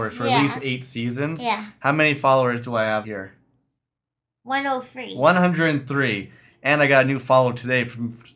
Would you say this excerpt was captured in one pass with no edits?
no; 1 cut; at 3.0 s

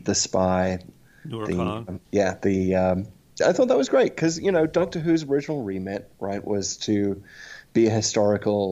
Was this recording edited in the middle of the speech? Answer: yes; 2 cuts; at 2.0 s, 3.4 s

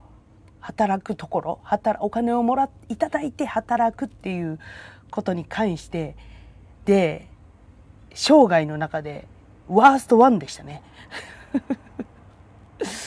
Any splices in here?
no; 0 cuts

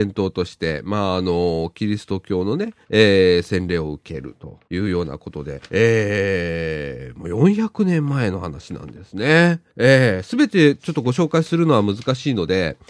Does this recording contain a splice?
yes; 4 cuts; at 2.8 s, 4.6 s, 5.7 s, 9.7 s

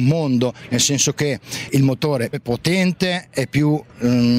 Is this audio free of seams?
no; 2 cuts; at 1.7 s, 2.3 s

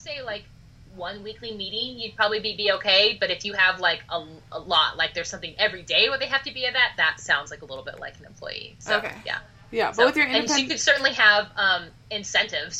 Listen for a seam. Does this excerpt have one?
no; 0 cuts

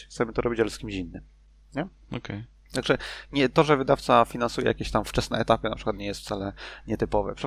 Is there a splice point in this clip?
no; 0 cuts

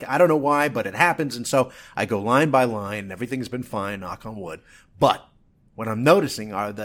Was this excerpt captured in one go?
yes; 0 cuts

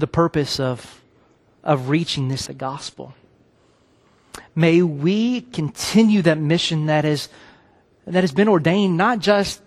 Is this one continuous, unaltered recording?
no; 1 cut; at 2.5 s

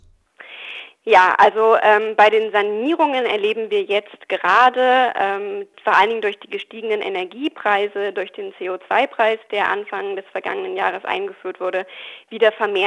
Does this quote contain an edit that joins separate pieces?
no; 0 cuts

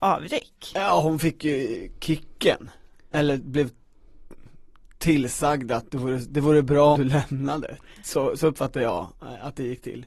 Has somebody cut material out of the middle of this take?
yes; 1 cut; at 7.0 s

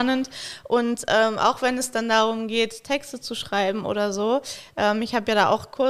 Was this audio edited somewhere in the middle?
no; 0 cuts

